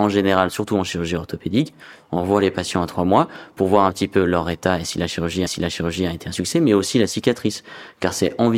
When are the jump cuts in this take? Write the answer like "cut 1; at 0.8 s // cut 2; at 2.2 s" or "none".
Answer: cut 1; at 5.5 s